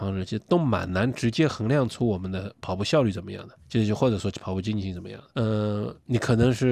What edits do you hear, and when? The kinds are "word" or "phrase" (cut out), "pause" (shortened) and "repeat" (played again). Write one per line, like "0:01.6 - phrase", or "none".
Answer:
0:03.6 - pause
0:05.3 - pause